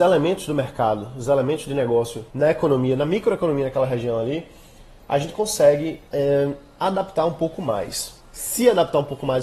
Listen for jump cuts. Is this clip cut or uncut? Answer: cut